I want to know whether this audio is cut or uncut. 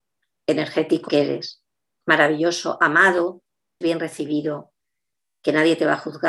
cut